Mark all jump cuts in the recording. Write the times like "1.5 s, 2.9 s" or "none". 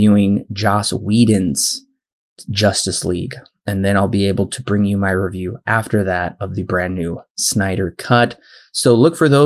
none